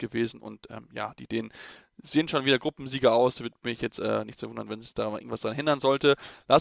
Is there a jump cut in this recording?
no; 0 cuts

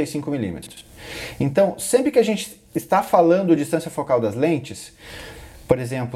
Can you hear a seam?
no; 0 cuts

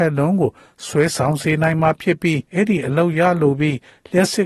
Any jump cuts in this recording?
yes; 1 cut; at 2.4 s

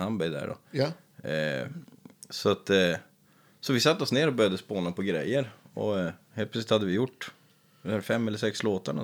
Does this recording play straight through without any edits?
yes; 0 cuts

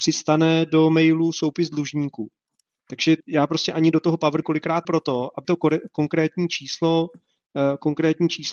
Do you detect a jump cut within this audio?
yes; 4 cuts; at 3.2 s, 4.4 s, 4.8 s, 5.4 s

